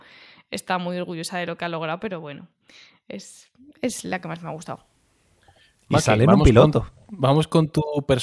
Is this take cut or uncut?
uncut